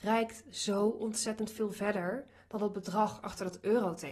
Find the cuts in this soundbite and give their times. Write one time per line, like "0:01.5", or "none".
none